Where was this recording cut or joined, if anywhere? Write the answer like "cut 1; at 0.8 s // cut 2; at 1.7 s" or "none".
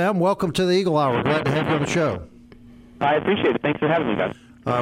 none